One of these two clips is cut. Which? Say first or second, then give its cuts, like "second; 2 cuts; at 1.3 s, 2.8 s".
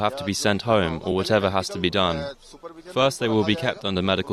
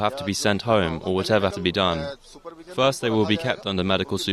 second; 1 cut; at 1.5 s